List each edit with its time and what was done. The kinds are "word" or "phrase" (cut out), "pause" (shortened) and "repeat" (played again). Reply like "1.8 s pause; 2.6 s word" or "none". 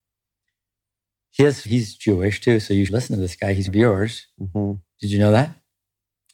1.6 s word; 2.9 s word; 3.7 s word